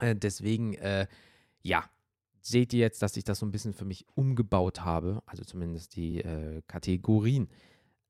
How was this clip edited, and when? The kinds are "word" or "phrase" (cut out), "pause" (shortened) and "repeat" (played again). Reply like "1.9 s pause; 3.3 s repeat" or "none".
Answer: none

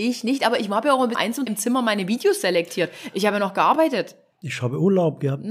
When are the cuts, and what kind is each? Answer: 1.1 s word; 1.5 s word

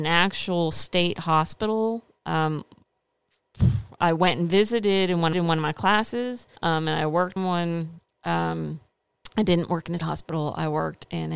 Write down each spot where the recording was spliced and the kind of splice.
4.0 s word; 5.3 s repeat; 6.6 s pause; 7.4 s word; 10.0 s word

